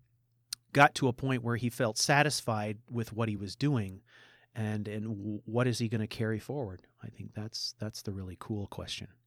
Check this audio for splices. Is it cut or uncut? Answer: uncut